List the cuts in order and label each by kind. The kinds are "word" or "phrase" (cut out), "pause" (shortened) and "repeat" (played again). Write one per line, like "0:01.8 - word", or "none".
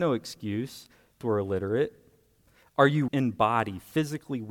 0:01.2 - word
0:03.1 - word